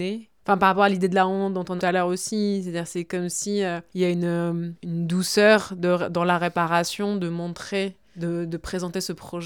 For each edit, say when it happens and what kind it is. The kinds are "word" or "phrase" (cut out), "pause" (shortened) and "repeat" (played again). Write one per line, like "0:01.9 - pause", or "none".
0:01.8 - phrase